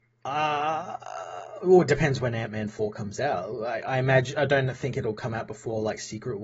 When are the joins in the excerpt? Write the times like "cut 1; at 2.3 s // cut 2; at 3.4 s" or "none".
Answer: none

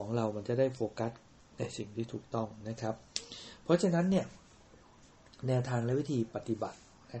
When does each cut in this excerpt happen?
none

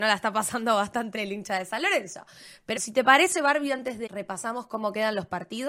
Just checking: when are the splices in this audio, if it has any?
cut 1; at 1.1 s // cut 2; at 2.8 s // cut 3; at 4.1 s

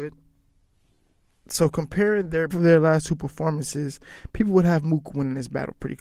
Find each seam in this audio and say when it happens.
cut 1; at 2.5 s

